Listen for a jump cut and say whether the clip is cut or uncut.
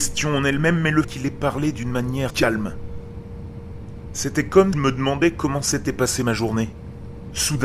cut